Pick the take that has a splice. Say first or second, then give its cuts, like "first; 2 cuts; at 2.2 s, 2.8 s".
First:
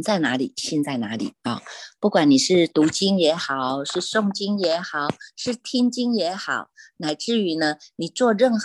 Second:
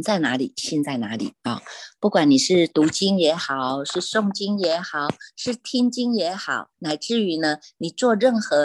second; 1 cut; at 6.7 s